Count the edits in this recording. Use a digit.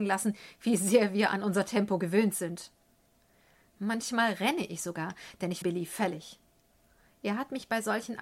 1